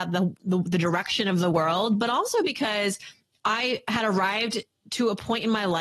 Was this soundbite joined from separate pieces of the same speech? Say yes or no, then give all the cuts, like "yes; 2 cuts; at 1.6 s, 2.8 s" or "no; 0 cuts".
no; 0 cuts